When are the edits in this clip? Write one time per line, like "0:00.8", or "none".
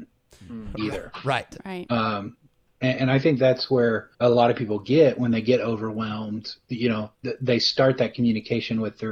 0:02.7
0:04.1
0:07.1